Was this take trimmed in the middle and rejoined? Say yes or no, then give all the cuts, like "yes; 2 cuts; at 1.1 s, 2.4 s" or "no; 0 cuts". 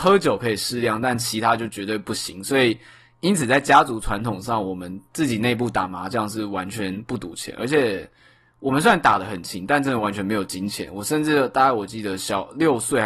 no; 0 cuts